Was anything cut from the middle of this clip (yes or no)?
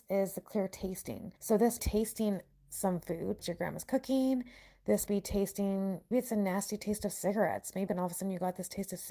yes